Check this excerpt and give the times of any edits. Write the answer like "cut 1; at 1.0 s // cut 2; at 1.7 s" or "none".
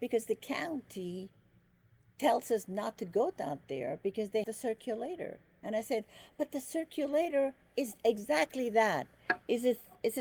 cut 1; at 4.4 s